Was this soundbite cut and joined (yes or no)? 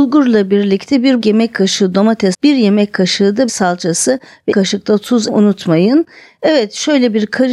yes